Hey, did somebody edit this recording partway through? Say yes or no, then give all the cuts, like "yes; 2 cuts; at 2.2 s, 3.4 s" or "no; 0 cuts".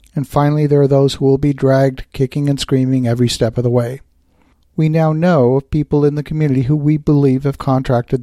no; 0 cuts